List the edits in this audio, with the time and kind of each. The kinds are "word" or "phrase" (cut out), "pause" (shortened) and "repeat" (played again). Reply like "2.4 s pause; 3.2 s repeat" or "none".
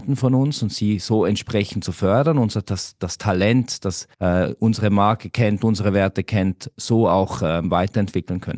4.1 s pause